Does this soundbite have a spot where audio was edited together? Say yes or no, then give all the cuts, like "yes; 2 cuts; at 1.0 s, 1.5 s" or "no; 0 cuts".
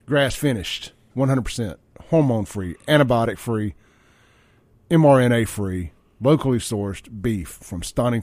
no; 0 cuts